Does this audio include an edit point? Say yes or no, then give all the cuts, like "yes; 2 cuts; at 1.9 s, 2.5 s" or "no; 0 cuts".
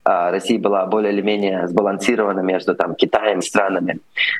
yes; 1 cut; at 3.4 s